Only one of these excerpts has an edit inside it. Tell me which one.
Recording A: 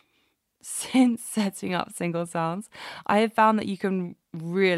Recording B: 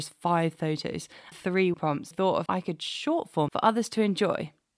B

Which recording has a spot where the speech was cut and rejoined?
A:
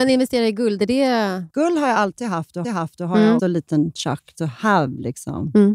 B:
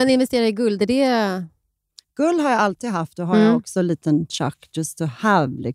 A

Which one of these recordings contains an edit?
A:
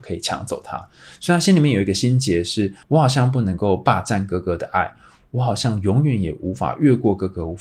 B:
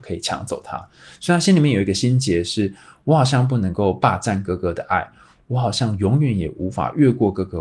A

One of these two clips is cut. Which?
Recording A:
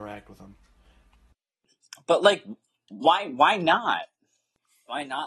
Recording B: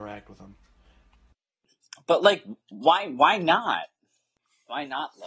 B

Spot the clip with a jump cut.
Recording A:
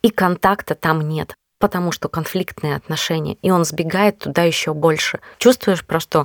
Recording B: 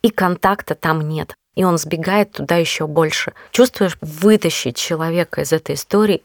B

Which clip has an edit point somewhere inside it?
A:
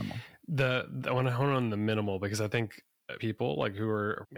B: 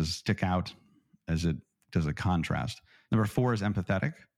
A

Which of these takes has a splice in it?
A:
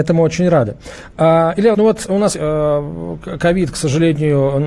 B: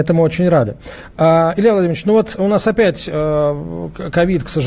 A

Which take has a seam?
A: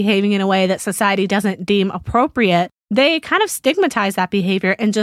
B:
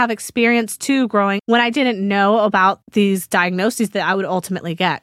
B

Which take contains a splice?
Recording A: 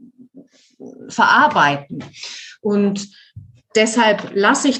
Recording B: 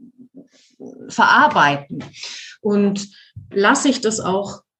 B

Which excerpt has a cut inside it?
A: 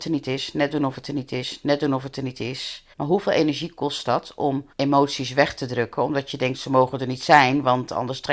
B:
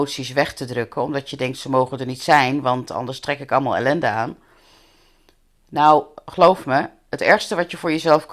A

